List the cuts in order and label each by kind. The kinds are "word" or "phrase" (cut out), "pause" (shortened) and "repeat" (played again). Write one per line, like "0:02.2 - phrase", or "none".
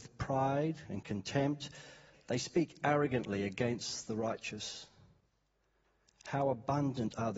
none